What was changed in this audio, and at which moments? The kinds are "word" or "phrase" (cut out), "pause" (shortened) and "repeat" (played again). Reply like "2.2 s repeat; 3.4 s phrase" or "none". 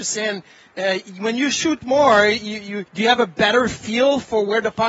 2.9 s pause